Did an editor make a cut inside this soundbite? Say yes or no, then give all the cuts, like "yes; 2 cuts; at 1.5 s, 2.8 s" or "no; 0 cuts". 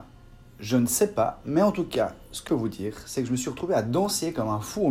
yes; 1 cut; at 2.5 s